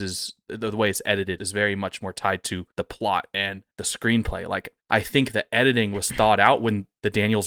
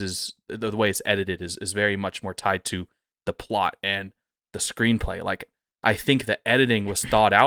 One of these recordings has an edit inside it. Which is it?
first; 4 cuts; at 1.4 s, 2.7 s, 3.7 s, 4.8 s

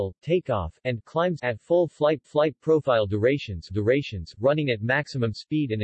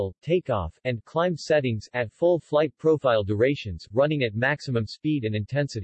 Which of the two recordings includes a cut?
first; 3 cuts; at 1.4 s, 2.2 s, 3.7 s

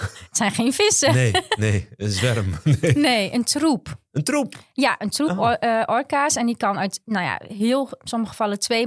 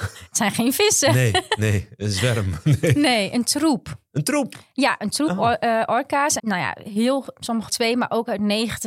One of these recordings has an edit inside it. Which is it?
second; 2 cuts; at 6.4 s, 7.7 s

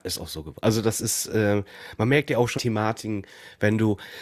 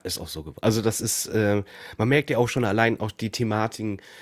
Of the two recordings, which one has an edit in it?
first; 1 cut; at 2.6 s

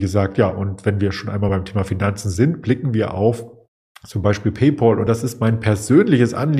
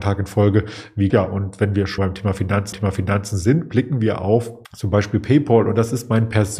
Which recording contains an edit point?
second; 4 cuts; at 1.1 s, 2.0 s, 2.7 s, 4.6 s

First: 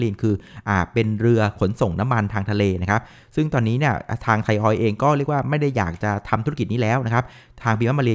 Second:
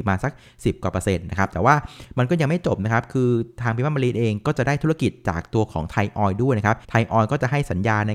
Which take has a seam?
second; 1 cut; at 6.8 s

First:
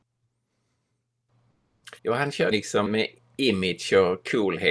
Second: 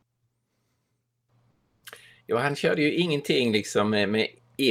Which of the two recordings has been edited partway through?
first; 3 cuts; at 2.0 s, 2.5 s, 2.9 s

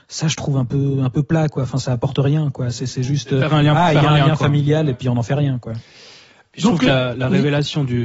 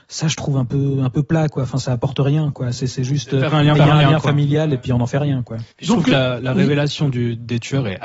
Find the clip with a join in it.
second; 2 cuts; at 3.8 s, 5.7 s

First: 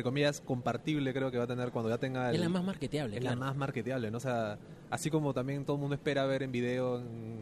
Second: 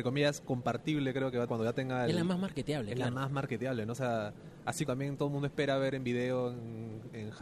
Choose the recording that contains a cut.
second; 2 cuts; at 1.5 s, 4.9 s

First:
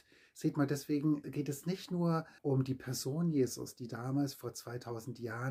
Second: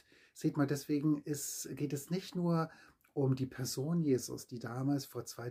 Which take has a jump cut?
first; 2 cuts; at 1.2 s, 2.4 s

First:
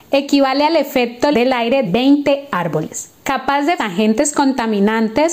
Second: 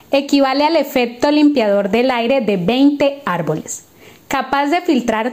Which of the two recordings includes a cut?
first; 4 cuts; at 1.3 s, 1.8 s, 3.2 s, 3.8 s

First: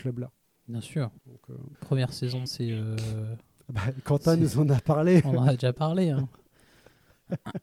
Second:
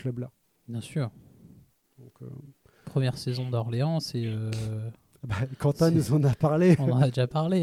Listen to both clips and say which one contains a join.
first; 3 cuts; at 1.2 s, 1.7 s, 2.5 s

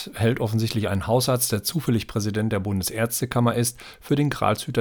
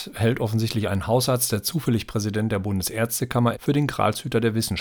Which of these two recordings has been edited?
second; 1 cut; at 3.5 s

